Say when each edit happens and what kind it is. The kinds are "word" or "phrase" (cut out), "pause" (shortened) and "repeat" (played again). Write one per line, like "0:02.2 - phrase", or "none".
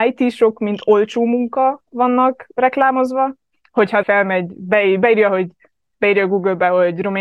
0:04.0 - word